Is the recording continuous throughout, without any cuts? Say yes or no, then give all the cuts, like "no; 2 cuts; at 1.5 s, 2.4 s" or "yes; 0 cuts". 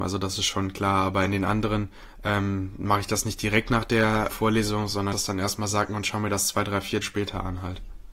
no; 3 cuts; at 4.3 s, 5.1 s, 7.0 s